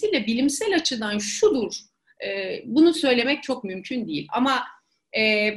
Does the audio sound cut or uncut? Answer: uncut